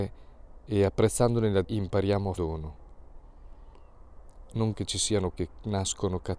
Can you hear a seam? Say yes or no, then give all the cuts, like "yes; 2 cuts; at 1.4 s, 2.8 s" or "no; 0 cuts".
yes; 4 cuts; at 1.6 s, 2.4 s, 4.7 s, 5.3 s